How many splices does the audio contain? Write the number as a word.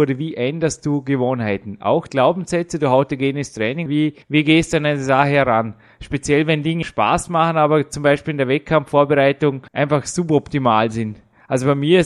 five